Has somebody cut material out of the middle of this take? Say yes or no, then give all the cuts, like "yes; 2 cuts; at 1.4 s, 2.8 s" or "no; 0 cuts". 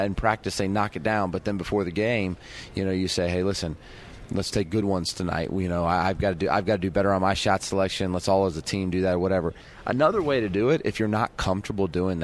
no; 0 cuts